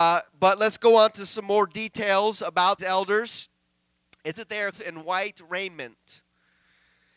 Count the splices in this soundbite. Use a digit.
3